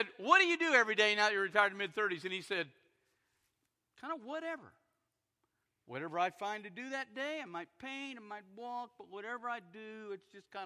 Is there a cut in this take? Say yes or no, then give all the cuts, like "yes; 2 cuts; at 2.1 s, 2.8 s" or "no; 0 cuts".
no; 0 cuts